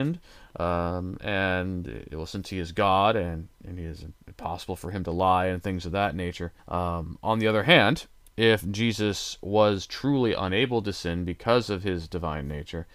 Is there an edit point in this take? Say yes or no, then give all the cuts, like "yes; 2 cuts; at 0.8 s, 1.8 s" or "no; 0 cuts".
yes; 2 cuts; at 6.6 s, 8.2 s